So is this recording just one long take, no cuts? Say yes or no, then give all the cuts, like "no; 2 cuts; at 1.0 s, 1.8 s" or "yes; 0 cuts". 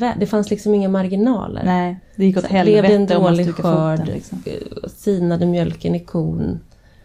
yes; 0 cuts